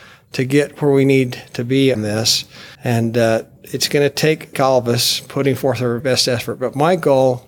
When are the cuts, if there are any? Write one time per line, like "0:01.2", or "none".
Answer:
0:01.9
0:02.7
0:04.5
0:06.0